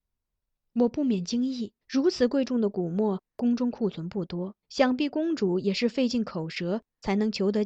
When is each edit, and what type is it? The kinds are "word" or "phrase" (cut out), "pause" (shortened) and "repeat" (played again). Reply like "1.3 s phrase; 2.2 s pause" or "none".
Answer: 1.8 s pause; 4.6 s pause

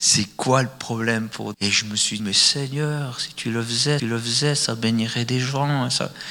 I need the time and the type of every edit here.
1.5 s word; 2.2 s word; 4.0 s repeat

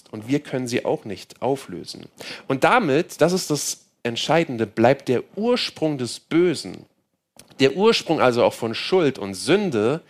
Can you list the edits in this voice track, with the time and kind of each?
none

